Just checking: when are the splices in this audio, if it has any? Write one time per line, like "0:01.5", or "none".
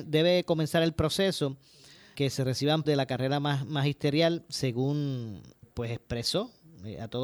0:02.1
0:02.8
0:05.6